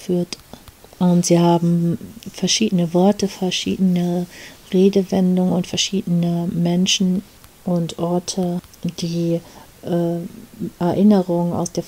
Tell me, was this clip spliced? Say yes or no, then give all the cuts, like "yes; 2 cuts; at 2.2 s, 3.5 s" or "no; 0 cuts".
no; 0 cuts